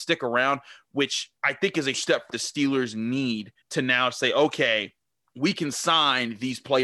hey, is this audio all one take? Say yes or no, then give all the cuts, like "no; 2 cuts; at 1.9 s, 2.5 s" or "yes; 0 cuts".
no; 5 cuts; at 1.4 s, 1.9 s, 2.3 s, 3.6 s, 5.2 s